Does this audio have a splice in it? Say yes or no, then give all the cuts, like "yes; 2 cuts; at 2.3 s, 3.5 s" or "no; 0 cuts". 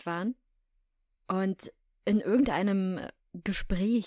no; 0 cuts